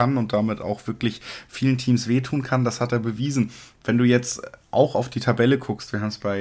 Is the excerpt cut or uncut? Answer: uncut